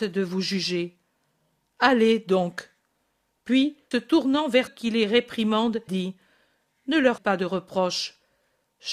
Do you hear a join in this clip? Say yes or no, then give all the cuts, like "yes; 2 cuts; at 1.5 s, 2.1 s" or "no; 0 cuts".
yes; 4 cuts; at 3.9 s, 4.7 s, 5.9 s, 7.2 s